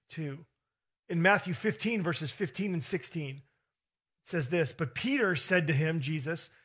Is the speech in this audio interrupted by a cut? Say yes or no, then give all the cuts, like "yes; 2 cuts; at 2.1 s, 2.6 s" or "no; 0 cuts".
no; 0 cuts